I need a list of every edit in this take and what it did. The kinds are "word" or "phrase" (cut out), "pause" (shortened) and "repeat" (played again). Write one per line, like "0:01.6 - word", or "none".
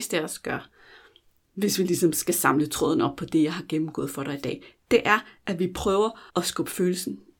0:06.3 - pause

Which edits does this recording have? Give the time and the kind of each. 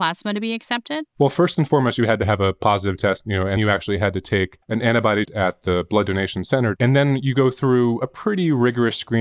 0:01.1 - pause
0:03.6 - word
0:04.6 - pause
0:05.2 - phrase

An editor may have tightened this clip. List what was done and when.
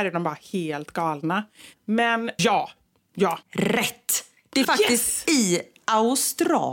0:02.4 - phrase
0:03.4 - pause
0:04.6 - word

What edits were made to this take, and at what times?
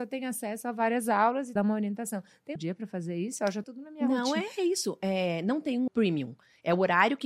0:01.6 - phrase
0:02.6 - phrase
0:03.6 - phrase
0:05.9 - word

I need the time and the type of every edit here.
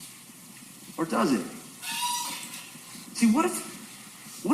0:03.1 - pause

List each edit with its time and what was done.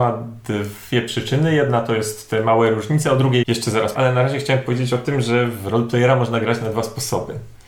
0:03.4 - word
0:03.9 - word

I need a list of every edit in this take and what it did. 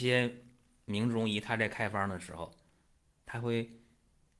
none

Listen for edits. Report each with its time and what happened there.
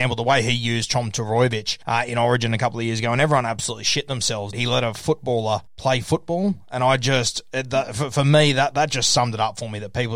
0:01.8 - pause
0:04.5 - word
0:05.7 - pause

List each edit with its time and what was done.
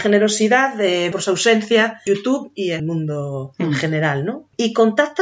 0:01.1 - word
0:02.1 - word
0:02.8 - word

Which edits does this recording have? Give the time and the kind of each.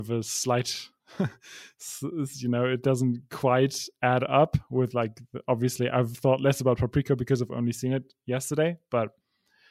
0:01.0 - pause

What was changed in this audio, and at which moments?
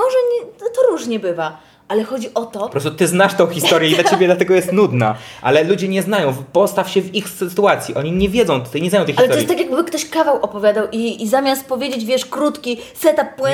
none

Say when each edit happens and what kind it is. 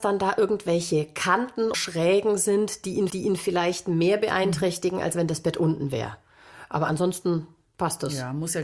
0:01.7 - word
0:03.1 - repeat
0:07.6 - pause

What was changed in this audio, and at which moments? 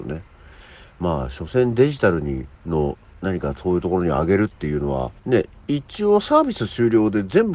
0:02.5 - pause
0:05.2 - pause

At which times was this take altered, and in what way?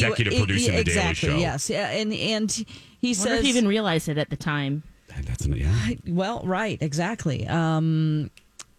none

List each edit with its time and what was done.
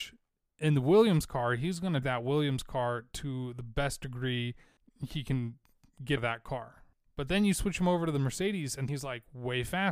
0:02.0 - word
0:06.2 - word
0:08.9 - word

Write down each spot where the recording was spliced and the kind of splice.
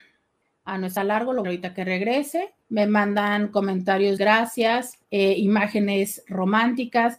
0:01.0 - word
0:01.4 - phrase
0:02.6 - pause
0:04.2 - phrase
0:05.0 - pause

